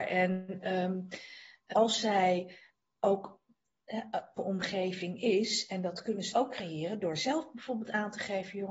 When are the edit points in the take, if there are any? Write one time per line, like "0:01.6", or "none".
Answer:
0:01.7
0:04.4
0:06.3